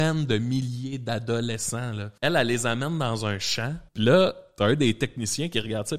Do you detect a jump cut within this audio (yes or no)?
yes